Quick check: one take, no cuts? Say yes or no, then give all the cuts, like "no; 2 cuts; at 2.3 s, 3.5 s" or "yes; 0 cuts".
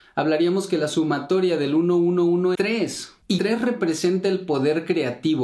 no; 2 cuts; at 2.5 s, 3.4 s